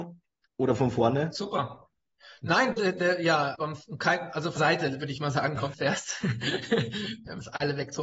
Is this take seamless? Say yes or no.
no